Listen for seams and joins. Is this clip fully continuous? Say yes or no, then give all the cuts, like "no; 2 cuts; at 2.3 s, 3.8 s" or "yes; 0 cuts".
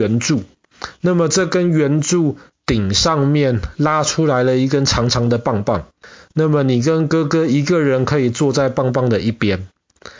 yes; 0 cuts